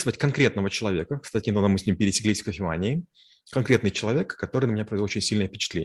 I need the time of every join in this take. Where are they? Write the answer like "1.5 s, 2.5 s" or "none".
none